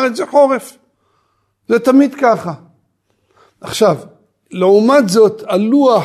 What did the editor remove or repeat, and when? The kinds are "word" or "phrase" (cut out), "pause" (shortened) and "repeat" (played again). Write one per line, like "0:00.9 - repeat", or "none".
none